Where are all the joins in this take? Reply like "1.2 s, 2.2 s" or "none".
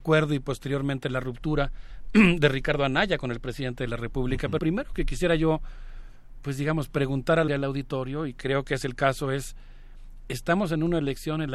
4.6 s, 7.5 s